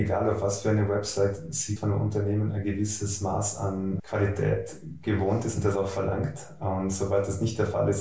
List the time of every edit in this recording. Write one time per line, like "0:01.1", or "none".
0:01.8
0:04.0